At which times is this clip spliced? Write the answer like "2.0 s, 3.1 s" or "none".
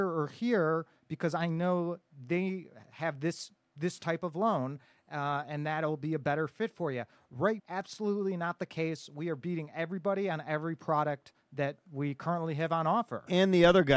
7.6 s